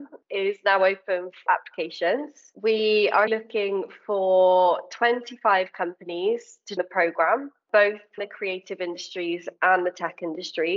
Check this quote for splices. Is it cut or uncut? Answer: cut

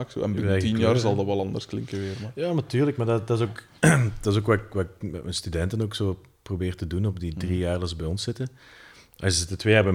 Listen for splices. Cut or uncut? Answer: uncut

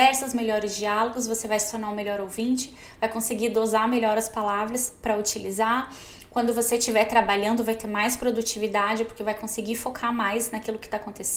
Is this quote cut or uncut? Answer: uncut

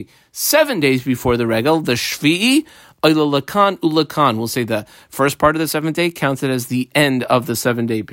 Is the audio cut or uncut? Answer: uncut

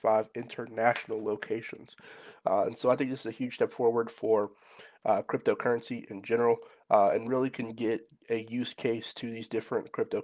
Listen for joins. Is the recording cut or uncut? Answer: uncut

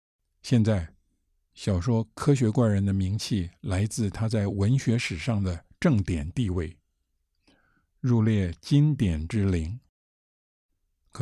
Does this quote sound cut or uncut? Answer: uncut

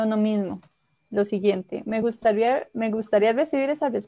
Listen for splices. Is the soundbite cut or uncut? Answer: uncut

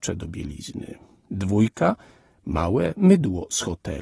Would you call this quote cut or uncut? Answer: uncut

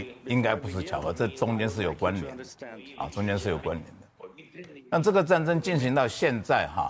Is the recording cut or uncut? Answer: uncut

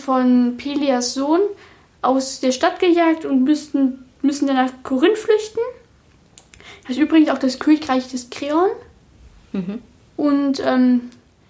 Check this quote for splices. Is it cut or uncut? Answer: uncut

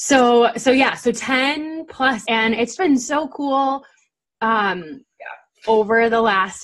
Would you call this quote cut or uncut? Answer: cut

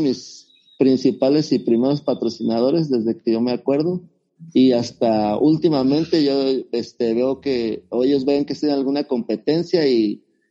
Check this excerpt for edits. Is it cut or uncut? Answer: uncut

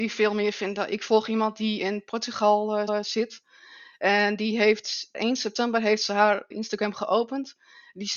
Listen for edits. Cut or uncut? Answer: cut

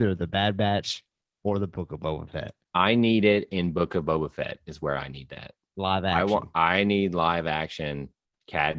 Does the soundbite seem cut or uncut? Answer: uncut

